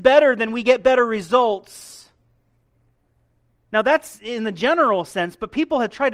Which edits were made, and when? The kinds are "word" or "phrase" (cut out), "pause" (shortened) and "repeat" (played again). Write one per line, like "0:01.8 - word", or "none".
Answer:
none